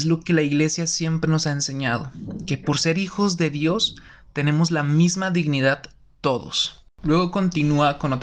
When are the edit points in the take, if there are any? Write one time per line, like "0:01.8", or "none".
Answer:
none

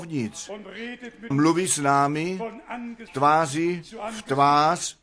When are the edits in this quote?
0:01.3
0:03.1

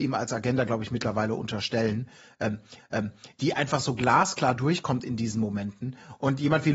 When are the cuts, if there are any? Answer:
0:02.8

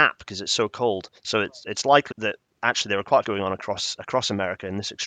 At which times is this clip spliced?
0:01.2
0:02.1
0:03.2

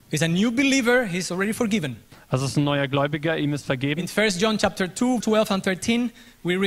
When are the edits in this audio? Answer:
0:05.2

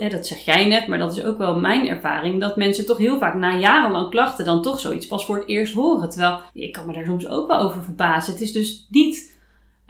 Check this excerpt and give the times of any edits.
0:06.5

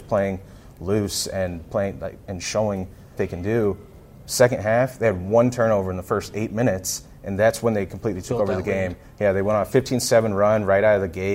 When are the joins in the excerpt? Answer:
0:03.2

